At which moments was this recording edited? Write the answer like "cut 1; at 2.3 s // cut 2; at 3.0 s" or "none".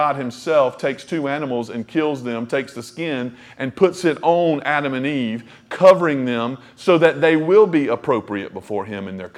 none